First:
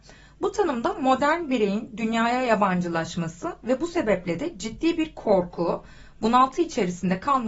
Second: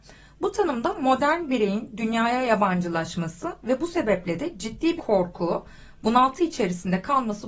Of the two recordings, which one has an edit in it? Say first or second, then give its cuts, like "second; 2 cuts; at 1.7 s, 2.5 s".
second; 1 cut; at 5.0 s